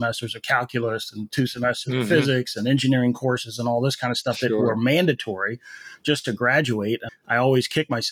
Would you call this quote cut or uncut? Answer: cut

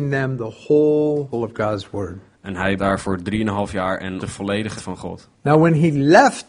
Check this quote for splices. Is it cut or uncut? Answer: cut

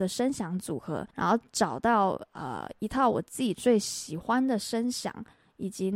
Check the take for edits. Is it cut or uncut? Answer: cut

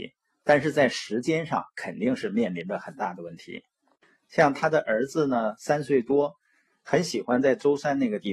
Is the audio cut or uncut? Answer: uncut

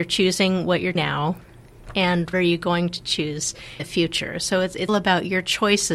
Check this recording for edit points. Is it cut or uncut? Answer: cut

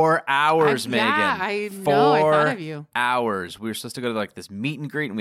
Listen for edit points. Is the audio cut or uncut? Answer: uncut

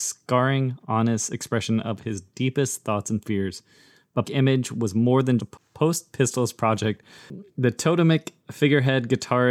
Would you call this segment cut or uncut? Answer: cut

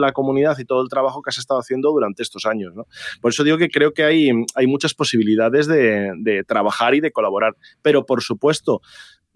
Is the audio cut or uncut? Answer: uncut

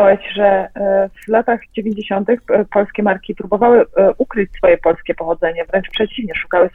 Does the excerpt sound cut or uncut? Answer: uncut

